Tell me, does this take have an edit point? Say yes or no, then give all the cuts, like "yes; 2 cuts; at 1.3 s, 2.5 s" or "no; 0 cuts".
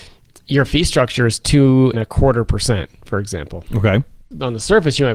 yes; 1 cut; at 1.9 s